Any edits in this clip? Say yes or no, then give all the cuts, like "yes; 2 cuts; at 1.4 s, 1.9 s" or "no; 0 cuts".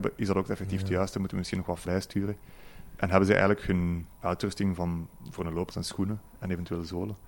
yes; 3 cuts; at 1.8 s, 4.1 s, 5.7 s